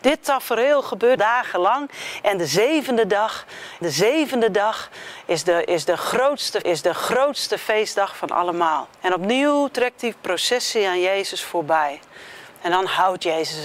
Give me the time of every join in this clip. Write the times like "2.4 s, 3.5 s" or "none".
1.2 s, 3.8 s, 6.6 s, 8.9 s